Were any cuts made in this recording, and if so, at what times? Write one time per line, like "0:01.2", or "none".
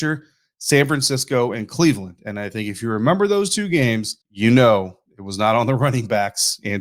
0:04.2